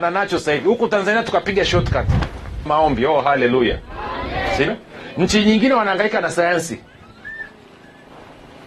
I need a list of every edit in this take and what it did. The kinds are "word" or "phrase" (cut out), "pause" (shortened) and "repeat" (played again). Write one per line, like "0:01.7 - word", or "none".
0:02.7 - word
0:04.7 - word